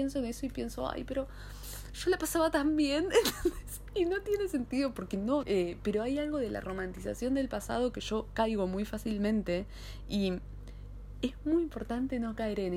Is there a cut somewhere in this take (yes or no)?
yes